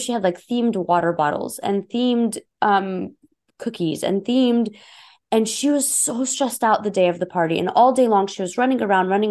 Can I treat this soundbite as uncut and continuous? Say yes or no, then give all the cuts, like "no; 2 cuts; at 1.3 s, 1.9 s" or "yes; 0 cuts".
yes; 0 cuts